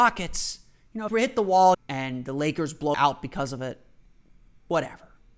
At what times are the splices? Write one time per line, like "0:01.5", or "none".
0:01.1
0:01.7
0:02.9